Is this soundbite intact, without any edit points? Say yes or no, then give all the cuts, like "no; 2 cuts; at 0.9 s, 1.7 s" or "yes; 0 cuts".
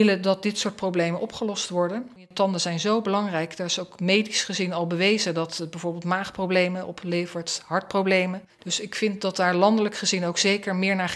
no; 1 cut; at 8.5 s